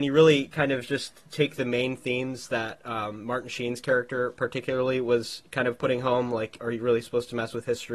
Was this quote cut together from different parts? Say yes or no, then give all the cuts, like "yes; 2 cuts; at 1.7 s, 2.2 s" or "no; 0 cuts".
no; 0 cuts